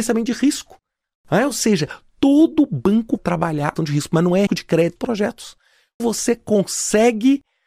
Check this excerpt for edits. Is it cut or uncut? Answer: cut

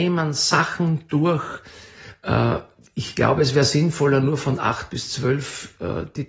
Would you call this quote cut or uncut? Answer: uncut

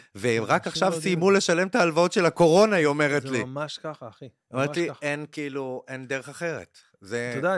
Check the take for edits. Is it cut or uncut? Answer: uncut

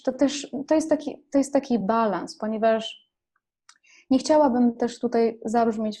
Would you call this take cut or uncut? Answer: uncut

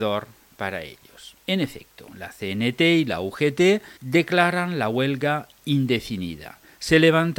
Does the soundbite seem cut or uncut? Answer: cut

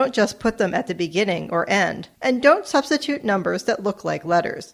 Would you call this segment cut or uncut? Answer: cut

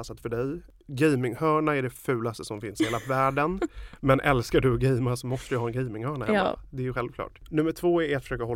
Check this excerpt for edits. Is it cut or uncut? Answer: uncut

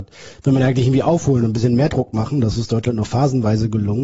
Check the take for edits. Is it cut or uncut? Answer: uncut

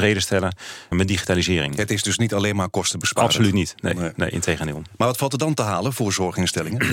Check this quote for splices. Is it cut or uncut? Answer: cut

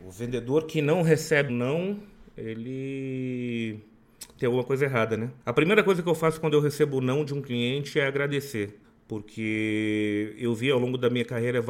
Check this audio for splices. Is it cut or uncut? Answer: cut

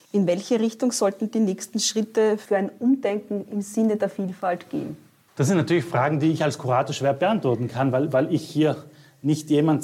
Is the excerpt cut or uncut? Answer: uncut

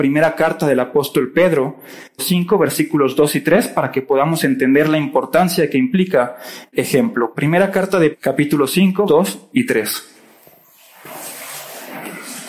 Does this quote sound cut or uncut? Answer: cut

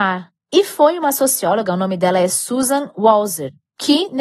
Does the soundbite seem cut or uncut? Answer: uncut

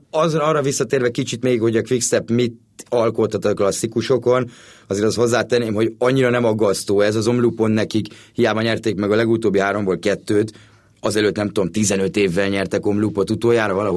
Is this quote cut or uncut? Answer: uncut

